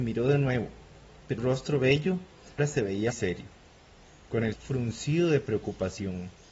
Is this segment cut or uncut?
cut